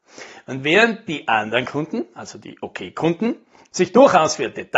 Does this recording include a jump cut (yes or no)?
no